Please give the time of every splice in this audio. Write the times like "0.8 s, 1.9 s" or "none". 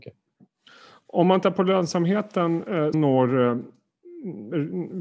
1.4 s, 2.9 s